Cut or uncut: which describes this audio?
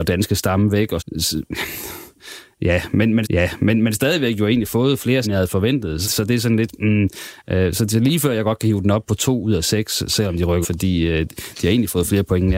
cut